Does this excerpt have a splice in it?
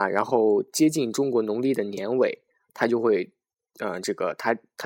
no; 0 cuts

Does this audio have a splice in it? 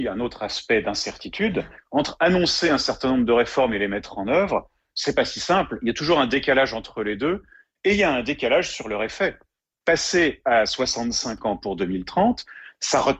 no; 0 cuts

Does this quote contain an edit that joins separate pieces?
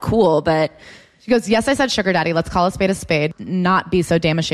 no; 0 cuts

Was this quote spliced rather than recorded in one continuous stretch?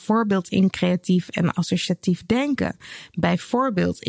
no; 0 cuts

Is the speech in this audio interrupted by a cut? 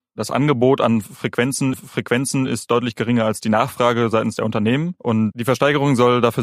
yes; 2 cuts; at 1.7 s, 5.3 s

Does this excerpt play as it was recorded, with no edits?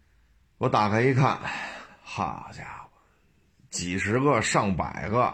yes; 0 cuts

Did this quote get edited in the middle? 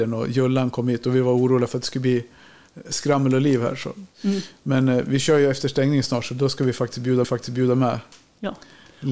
yes; 1 cut; at 7.2 s

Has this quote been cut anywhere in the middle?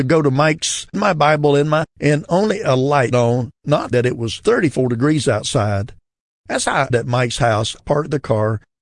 yes; 6 cuts; at 0.9 s, 1.8 s, 3.1 s, 3.9 s, 6.9 s, 7.8 s

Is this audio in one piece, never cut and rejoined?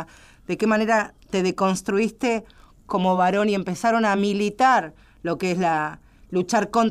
yes; 0 cuts

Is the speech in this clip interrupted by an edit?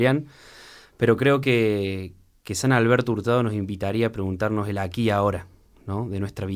no; 0 cuts

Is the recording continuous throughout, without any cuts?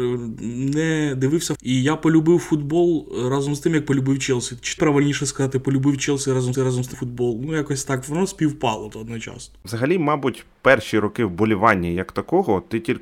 no; 5 cuts; at 1.5 s, 4.8 s, 6.5 s, 6.9 s, 8.9 s

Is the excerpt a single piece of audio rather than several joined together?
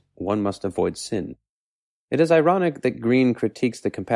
no; 1 cut; at 1.8 s

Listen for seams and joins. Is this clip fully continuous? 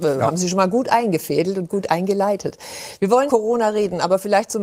no; 1 cut; at 3.3 s

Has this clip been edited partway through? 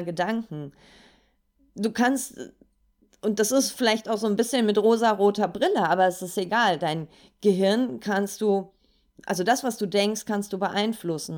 no; 0 cuts

